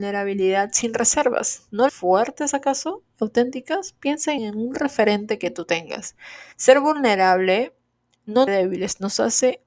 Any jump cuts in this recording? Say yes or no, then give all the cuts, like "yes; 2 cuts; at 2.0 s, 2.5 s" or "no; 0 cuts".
yes; 4 cuts; at 1.9 s, 4.4 s, 6.5 s, 8.5 s